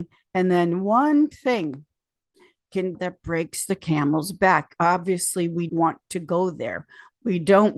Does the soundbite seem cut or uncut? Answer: cut